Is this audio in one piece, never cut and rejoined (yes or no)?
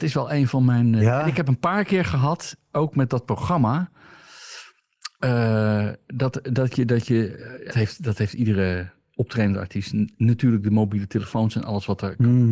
no